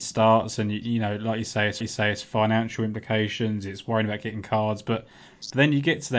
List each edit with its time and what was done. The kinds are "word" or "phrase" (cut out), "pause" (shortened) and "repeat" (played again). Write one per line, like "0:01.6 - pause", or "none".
0:01.8 - repeat